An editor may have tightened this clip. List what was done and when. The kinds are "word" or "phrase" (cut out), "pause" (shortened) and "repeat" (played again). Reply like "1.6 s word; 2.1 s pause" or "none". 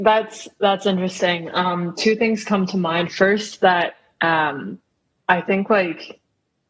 none

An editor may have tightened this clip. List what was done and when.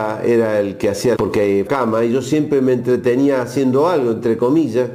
1.1 s phrase; 1.7 s phrase

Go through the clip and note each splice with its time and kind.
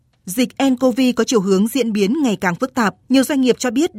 3.0 s pause

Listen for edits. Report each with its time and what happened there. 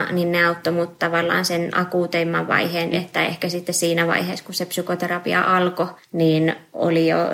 2.9 s word; 6.0 s pause

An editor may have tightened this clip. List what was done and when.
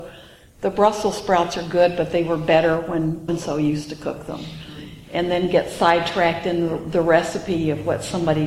3.3 s word

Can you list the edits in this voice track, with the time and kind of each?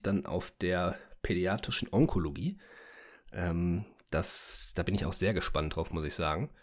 none

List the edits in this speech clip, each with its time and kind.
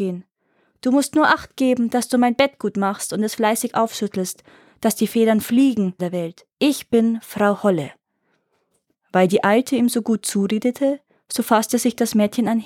6.0 s phrase; 6.5 s pause

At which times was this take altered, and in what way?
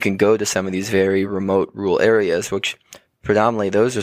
none

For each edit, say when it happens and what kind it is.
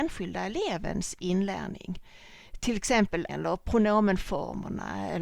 3.3 s phrase

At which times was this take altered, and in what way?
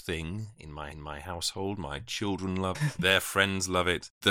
0.9 s repeat; 2.7 s word

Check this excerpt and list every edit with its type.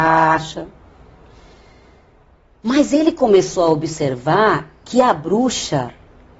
none

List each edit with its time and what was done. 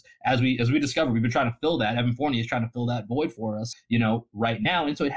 3.7 s word

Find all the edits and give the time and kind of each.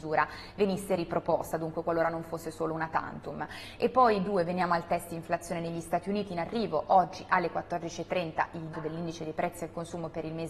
8.7 s word

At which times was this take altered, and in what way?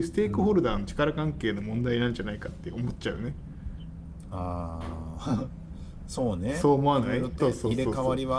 7.4 s word

